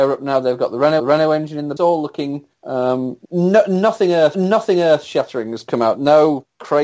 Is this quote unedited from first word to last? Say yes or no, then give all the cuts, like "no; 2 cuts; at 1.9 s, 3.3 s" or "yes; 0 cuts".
no; 5 cuts; at 1.0 s, 1.8 s, 2.5 s, 3.2 s, 4.3 s